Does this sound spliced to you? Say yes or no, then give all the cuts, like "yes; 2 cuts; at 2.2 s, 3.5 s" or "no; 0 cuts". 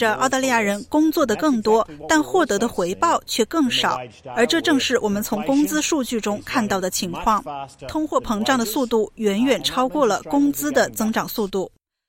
no; 0 cuts